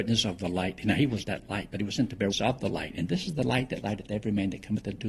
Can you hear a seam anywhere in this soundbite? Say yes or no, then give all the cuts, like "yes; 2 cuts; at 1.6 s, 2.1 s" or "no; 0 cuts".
yes; 2 cuts; at 1.2 s, 2.3 s